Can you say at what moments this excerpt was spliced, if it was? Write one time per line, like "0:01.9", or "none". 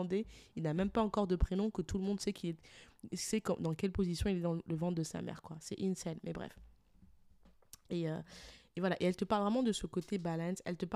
none